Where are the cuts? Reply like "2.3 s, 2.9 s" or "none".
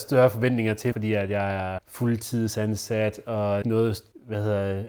0.9 s, 1.8 s, 3.6 s